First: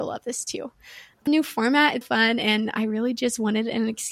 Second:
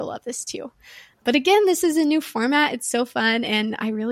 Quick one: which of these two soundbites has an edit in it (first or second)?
first